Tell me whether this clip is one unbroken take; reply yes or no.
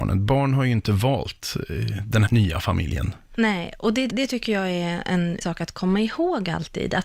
no